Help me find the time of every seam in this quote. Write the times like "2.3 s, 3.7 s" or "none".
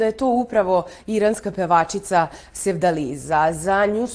none

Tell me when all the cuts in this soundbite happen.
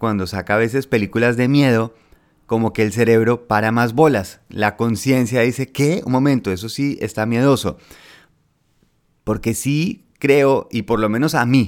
none

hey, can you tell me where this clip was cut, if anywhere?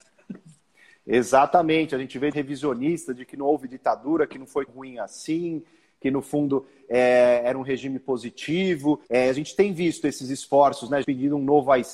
2.3 s, 4.7 s, 9.0 s, 11.0 s

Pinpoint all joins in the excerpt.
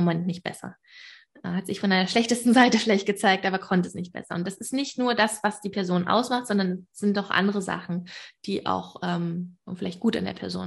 none

